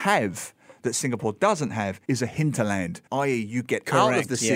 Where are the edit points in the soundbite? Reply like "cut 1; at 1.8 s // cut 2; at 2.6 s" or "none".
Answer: cut 1; at 2.0 s // cut 2; at 3.1 s